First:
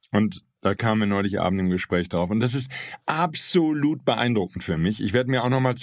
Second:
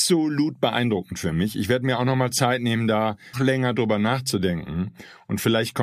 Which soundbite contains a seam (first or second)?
second